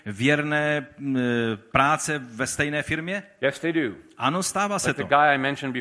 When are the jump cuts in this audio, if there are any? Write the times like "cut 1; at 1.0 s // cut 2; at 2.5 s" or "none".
none